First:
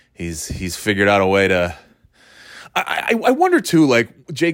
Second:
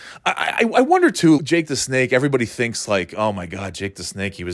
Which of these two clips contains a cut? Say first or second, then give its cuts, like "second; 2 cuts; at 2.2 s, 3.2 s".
second; 1 cut; at 1.4 s